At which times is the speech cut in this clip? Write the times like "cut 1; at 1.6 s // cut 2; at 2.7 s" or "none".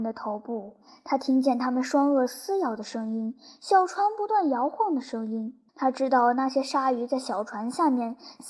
cut 1; at 5.7 s